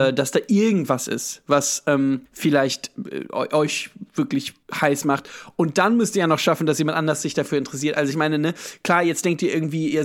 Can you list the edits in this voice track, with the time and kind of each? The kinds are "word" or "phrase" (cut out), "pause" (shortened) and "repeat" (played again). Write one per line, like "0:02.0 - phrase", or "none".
0:02.3 - pause
0:04.6 - pause